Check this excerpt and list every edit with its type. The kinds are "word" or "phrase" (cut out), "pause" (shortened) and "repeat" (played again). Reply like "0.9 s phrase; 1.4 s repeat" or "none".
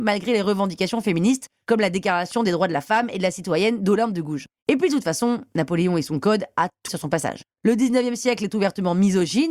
6.9 s word